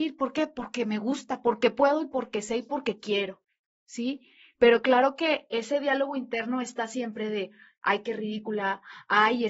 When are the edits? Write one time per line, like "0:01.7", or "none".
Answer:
none